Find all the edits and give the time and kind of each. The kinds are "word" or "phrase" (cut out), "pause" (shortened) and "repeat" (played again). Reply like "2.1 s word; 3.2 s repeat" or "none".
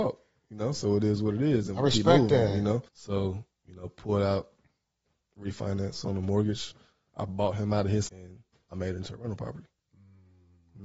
2.9 s pause; 8.1 s word